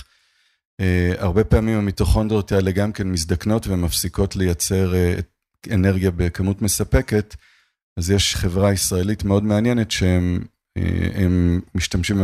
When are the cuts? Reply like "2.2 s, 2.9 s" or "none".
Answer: 8.3 s